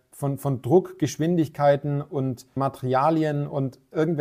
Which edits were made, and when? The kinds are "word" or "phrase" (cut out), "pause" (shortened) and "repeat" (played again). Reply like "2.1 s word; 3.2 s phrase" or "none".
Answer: 2.6 s word